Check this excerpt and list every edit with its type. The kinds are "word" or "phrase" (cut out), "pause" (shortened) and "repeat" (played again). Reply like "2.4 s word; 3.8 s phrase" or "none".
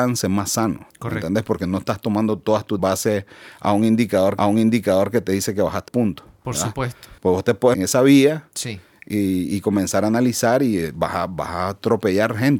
0.9 s pause; 2.8 s phrase; 4.4 s repeat; 5.9 s word; 7.2 s pause; 7.7 s phrase

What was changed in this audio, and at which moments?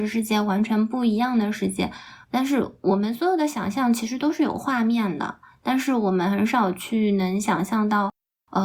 2.2 s pause

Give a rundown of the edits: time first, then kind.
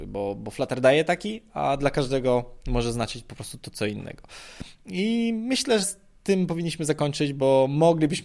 5.8 s word

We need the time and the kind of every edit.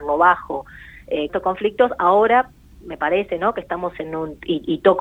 1.3 s phrase

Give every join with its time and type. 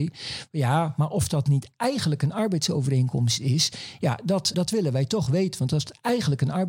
4.5 s word

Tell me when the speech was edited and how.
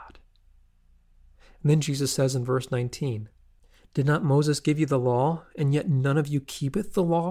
none

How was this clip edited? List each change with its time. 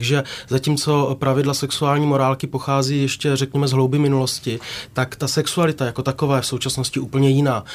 none

